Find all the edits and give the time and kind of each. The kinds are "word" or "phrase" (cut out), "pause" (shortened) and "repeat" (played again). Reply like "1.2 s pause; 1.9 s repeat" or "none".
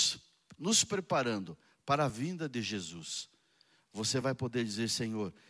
none